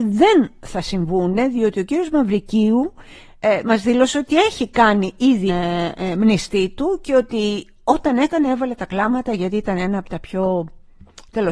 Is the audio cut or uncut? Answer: cut